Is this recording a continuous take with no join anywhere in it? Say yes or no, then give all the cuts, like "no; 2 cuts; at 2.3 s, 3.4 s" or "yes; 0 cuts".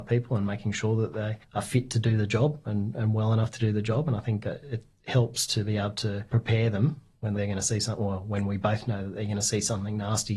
no; 1 cut; at 7.4 s